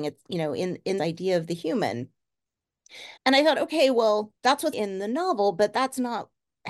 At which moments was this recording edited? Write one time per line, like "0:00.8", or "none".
0:01.0
0:03.2
0:04.4
0:04.7

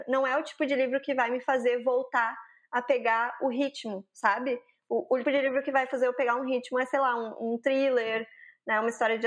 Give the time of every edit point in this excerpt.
0:05.2

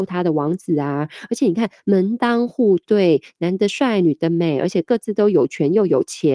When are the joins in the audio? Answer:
none

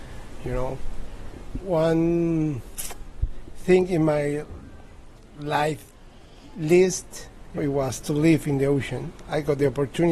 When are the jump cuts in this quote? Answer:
0:01.6
0:07.6

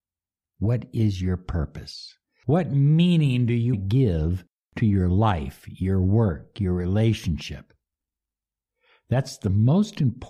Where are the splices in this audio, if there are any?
0:02.2
0:03.7

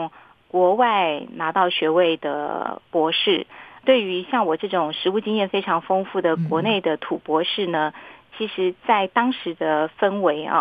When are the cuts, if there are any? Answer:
none

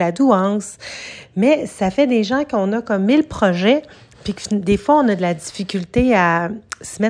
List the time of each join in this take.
none

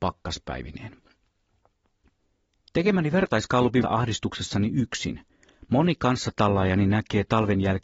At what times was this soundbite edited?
0:03.8

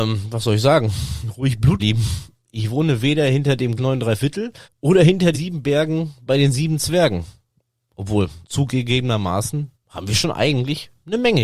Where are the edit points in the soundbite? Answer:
0:01.8
0:03.8
0:04.6
0:05.3
0:08.4
0:09.7

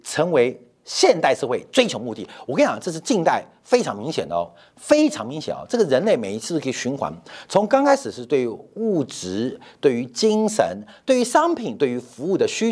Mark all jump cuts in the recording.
none

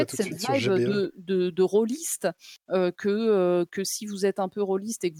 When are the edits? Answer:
none

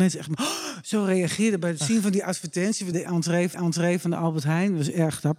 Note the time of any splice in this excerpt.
0:02.9
0:03.5

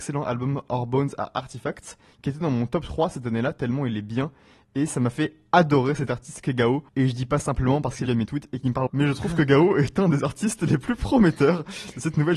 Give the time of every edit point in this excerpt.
0:06.9
0:07.4
0:08.1
0:08.9

